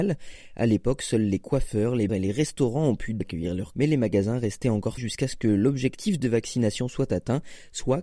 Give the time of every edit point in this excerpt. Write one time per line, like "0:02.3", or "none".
0:02.1
0:03.2
0:03.7
0:05.0